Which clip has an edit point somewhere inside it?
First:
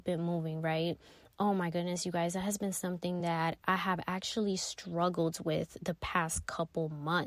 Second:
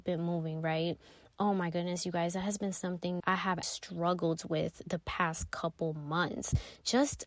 second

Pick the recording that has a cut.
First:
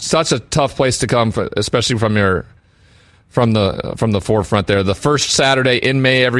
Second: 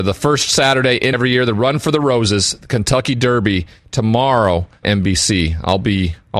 second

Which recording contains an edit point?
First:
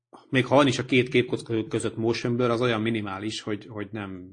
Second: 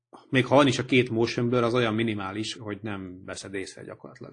second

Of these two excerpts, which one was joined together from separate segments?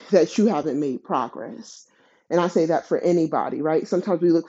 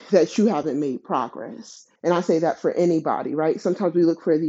second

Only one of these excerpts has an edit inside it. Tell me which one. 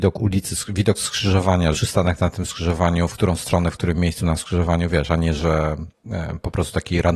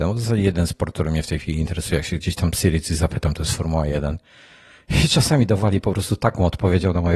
first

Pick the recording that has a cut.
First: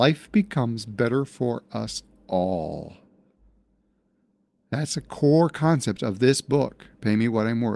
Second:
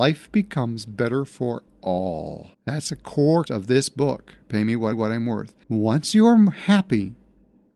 second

